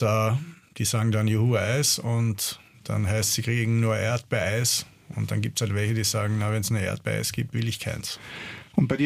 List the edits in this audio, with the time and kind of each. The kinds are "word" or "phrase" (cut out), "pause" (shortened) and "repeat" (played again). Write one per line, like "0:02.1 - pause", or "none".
none